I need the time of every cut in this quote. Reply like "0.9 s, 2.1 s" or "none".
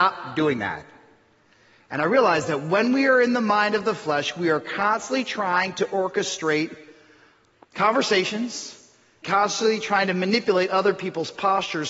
9.2 s